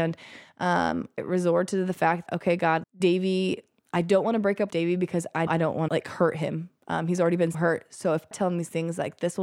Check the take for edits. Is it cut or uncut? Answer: cut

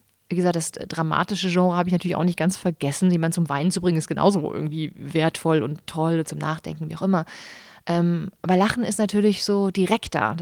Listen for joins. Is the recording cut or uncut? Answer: uncut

